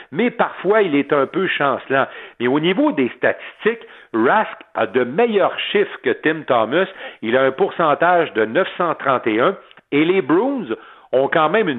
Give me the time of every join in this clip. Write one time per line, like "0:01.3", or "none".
none